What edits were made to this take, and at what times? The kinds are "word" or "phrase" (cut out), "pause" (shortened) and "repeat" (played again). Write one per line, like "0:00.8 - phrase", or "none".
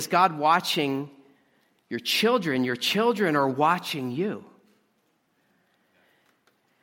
none